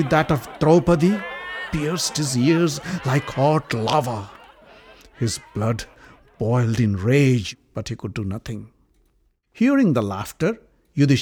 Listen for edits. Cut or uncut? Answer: uncut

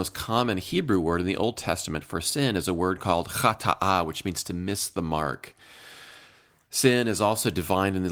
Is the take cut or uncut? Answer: uncut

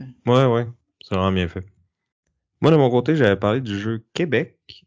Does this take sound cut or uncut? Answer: uncut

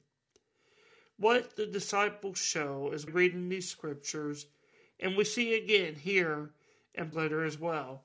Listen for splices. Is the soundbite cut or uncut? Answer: cut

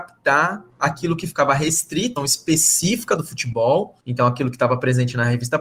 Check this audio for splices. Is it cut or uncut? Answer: cut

